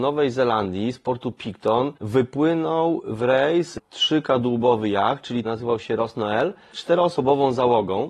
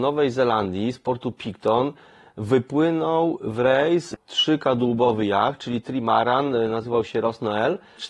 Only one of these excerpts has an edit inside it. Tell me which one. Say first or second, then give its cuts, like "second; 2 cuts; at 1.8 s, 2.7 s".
first; 2 cuts; at 2.0 s, 5.4 s